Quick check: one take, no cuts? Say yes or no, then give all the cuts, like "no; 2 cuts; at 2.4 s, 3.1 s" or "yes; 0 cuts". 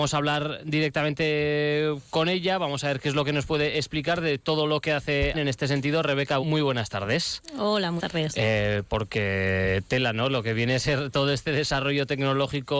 no; 3 cuts; at 5.3 s, 6.4 s, 8.0 s